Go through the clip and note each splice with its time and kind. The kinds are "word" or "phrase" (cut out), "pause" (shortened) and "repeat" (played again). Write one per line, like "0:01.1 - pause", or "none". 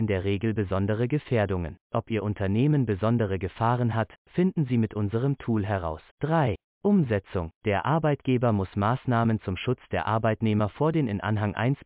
0:01.8 - pause
0:06.1 - pause
0:07.6 - pause